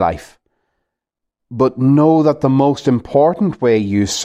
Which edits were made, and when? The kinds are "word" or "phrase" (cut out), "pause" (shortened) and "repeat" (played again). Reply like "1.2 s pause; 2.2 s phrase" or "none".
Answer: none